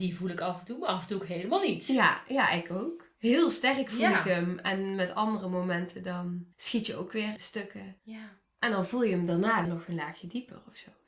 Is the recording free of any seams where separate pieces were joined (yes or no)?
no